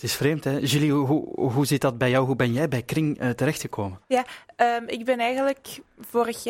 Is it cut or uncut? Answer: cut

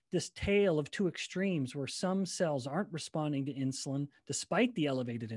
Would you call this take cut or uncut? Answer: uncut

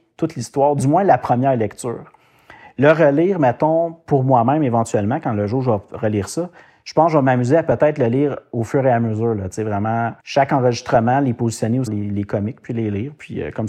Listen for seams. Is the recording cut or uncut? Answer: cut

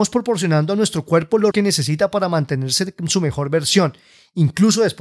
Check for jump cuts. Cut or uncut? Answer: cut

